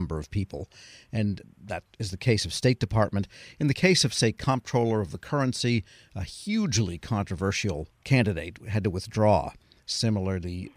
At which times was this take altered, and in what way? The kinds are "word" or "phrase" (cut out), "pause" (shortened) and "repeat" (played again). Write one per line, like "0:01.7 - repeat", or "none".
none